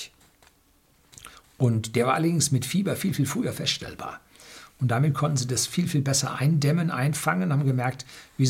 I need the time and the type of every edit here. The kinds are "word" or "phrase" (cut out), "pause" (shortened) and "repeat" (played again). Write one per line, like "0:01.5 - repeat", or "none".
none